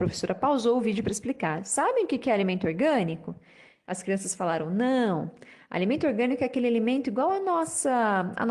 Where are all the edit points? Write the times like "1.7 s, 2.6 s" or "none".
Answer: none